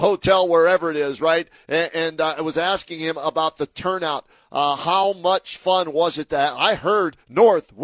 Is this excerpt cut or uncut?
uncut